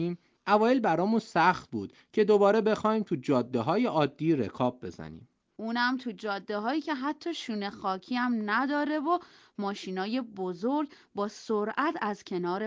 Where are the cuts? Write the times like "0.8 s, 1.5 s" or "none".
none